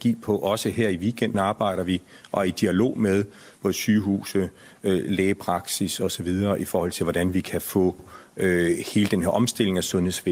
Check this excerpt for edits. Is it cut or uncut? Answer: uncut